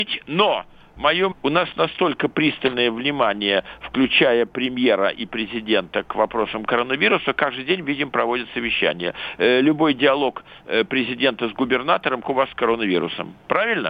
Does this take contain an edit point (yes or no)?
yes